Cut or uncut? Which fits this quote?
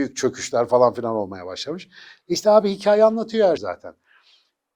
cut